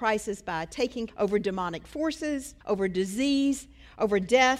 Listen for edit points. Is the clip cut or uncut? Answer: cut